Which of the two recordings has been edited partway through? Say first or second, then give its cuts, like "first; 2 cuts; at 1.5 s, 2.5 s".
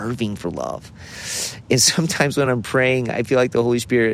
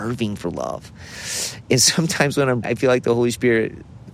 second; 1 cut; at 2.6 s